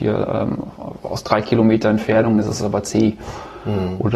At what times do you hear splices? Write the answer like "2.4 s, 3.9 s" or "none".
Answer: none